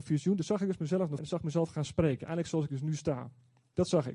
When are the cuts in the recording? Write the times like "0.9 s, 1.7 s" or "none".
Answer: 1.2 s